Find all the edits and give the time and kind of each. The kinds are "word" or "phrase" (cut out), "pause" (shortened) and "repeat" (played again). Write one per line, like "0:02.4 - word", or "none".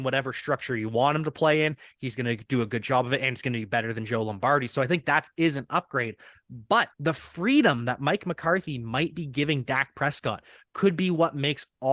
0:06.9 - pause